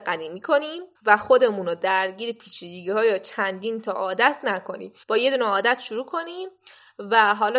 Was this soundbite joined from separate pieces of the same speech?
yes; 2 cuts; at 1.0 s, 5.0 s

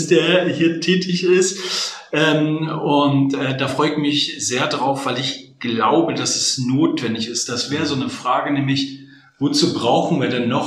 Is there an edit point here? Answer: no; 0 cuts

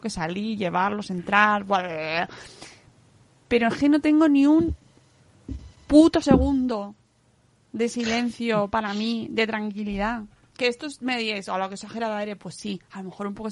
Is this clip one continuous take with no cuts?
yes; 0 cuts

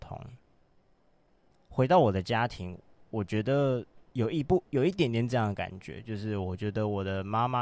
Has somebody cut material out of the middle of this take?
no; 0 cuts

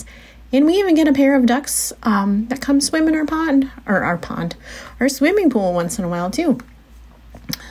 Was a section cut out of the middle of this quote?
no; 0 cuts

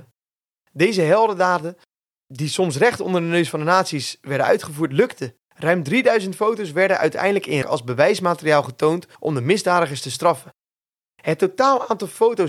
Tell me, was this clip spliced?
yes; 3 cuts; at 5.4 s, 7.6 s, 9.1 s

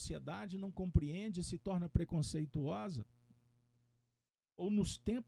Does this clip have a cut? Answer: no; 0 cuts

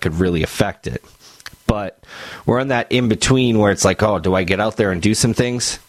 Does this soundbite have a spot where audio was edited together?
no; 0 cuts

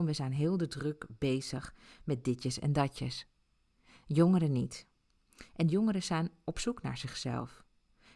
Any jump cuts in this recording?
no; 0 cuts

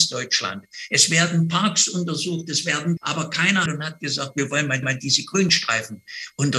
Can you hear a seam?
yes; 3 cuts; at 3.0 s, 3.7 s, 4.8 s

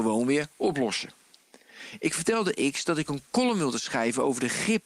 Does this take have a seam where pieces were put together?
no; 0 cuts

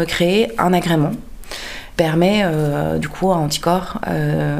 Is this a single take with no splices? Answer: no; 2 cuts; at 2.0 s, 3.0 s

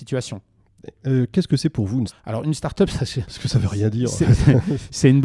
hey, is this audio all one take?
no; 1 cut; at 2.1 s

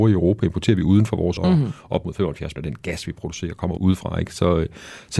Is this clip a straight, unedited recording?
no; 3 cuts; at 1.4 s, 2.6 s, 3.8 s

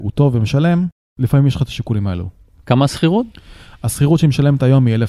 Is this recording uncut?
yes; 0 cuts

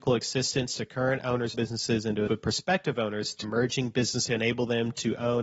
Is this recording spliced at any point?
yes; 4 cuts; at 1.5 s, 2.3 s, 3.4 s, 4.3 s

